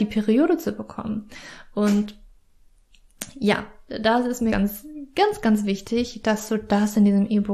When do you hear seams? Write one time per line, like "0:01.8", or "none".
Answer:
0:04.5